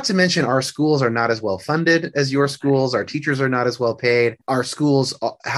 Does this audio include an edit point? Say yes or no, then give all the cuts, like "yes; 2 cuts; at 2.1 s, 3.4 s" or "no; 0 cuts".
yes; 1 cut; at 4.4 s